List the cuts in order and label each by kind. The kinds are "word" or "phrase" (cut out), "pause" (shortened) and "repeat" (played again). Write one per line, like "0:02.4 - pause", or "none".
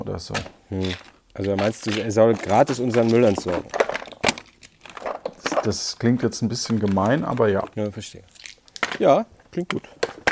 0:01.2 - pause
0:07.7 - pause

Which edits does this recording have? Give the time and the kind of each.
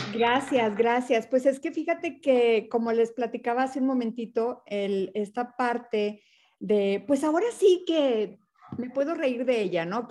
none

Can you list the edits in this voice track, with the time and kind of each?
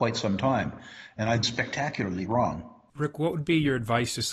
0:01.4 - word

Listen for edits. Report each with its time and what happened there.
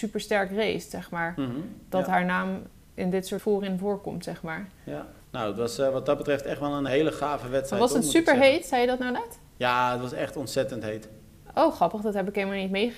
0:01.8 - pause
0:03.4 - word
0:05.2 - pause
0:06.9 - word

